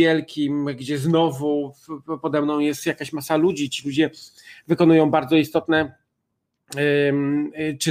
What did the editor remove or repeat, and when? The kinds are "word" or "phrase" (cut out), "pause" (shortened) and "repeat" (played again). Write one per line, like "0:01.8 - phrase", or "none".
none